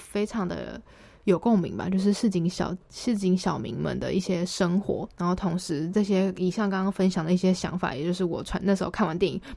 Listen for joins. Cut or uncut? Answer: cut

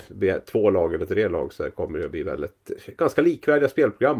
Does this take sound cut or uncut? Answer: uncut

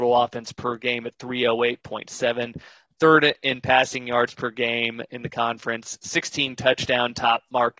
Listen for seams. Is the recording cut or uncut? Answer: uncut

